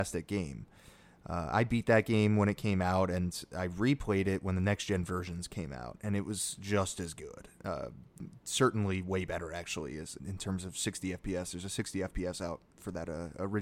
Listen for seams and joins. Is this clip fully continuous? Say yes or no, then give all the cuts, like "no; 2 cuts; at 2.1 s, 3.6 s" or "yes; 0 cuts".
no; 1 cut; at 10.2 s